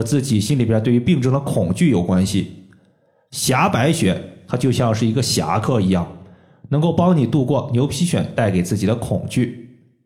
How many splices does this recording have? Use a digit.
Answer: 0